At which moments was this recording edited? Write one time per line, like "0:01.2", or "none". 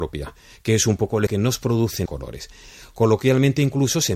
0:01.3
0:02.1